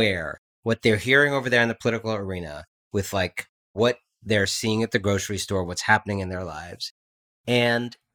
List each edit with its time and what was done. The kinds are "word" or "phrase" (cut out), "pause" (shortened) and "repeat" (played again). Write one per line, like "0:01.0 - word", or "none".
none